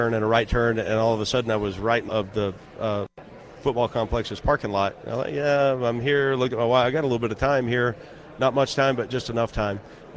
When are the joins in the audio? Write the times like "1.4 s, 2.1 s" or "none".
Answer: 2.1 s